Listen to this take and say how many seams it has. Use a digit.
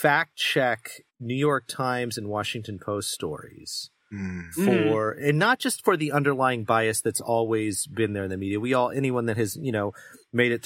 1